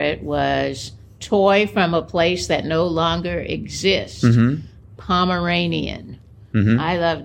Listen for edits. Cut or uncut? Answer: uncut